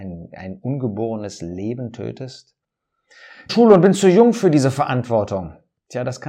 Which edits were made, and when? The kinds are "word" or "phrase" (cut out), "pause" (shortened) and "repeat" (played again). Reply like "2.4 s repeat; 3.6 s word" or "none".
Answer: 3.5 s phrase